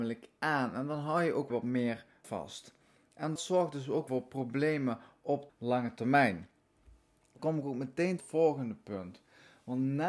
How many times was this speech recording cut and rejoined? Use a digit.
7